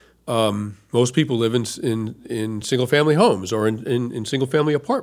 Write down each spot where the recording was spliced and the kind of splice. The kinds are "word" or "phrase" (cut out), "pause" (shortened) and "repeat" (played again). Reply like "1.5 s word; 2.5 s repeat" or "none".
none